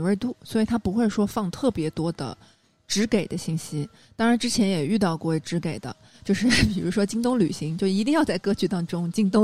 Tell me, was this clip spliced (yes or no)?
no